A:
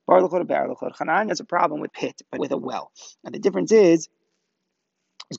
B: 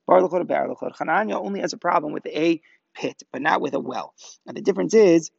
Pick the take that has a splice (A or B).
A